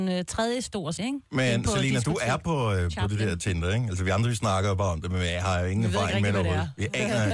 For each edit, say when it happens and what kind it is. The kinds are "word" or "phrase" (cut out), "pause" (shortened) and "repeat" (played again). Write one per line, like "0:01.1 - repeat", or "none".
0:01.0 - word